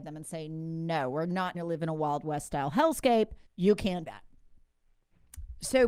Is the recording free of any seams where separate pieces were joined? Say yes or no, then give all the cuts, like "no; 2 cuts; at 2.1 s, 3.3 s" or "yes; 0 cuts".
no; 3 cuts; at 1.5 s, 3.5 s, 4.1 s